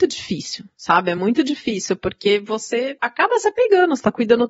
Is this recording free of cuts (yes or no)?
yes